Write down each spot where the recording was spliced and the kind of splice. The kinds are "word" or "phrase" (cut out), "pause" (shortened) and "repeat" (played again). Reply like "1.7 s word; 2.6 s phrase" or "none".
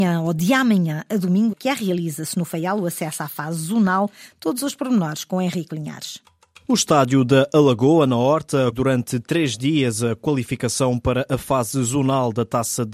1.5 s word; 8.7 s word